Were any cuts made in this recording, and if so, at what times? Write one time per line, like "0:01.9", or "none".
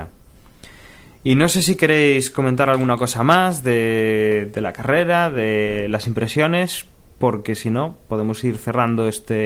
none